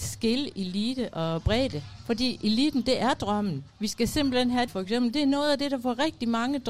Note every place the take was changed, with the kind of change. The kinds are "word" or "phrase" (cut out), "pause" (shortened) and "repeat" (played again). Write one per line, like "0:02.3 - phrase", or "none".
0:03.7 - pause
0:04.7 - phrase